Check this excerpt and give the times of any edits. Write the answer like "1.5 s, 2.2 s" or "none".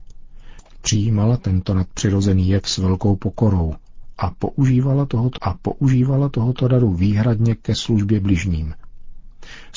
5.4 s